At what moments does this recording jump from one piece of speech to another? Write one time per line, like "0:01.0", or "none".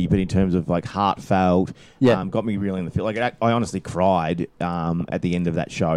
none